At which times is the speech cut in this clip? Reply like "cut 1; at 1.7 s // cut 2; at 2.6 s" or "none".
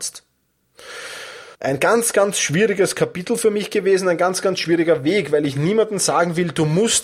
cut 1; at 1.5 s